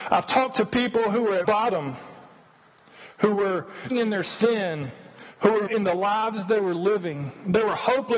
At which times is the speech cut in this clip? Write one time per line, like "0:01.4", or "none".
0:01.4
0:03.9
0:05.7